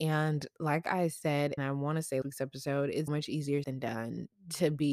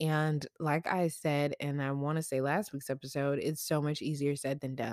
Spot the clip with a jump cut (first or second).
first